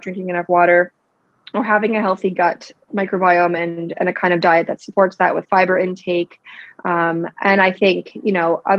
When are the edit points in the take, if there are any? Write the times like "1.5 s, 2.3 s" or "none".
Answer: none